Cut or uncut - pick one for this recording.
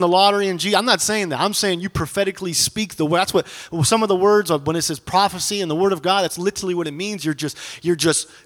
uncut